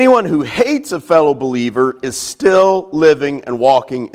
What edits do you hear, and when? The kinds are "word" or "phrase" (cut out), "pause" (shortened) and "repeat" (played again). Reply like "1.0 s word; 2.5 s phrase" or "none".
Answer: none